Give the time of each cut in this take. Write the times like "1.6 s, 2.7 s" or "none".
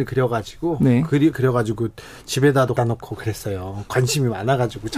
1.3 s, 2.8 s